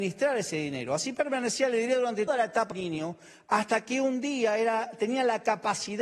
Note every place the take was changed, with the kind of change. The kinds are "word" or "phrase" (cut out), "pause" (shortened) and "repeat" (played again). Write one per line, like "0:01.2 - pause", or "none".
0:02.3 - word
0:02.7 - word